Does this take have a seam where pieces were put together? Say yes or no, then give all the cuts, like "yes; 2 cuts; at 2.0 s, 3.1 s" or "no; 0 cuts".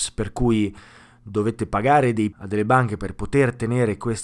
yes; 1 cut; at 2.3 s